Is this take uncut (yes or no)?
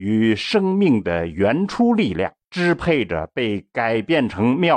no